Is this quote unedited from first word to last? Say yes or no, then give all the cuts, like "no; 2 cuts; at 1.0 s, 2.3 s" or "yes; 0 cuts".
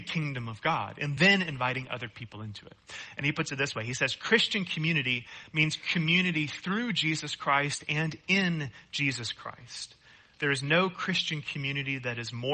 yes; 0 cuts